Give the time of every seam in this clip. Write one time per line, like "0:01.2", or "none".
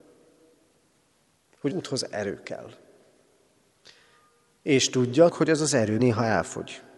0:01.7
0:05.3
0:06.0